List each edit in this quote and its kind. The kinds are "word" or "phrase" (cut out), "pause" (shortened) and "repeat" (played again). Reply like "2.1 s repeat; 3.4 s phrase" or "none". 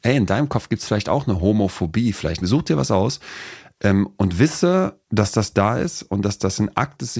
2.4 s phrase; 5.0 s pause

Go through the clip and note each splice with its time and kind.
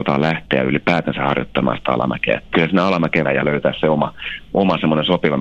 2.5 s word; 3.2 s phrase

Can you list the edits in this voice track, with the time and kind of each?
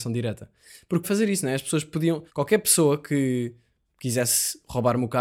1.0 s phrase; 2.3 s pause

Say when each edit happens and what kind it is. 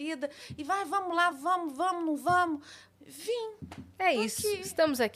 none

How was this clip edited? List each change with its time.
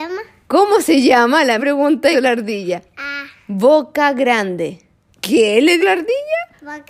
1.6 s word; 2.1 s word; 5.8 s word

